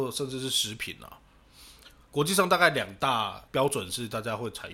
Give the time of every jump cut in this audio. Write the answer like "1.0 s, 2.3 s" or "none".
3.5 s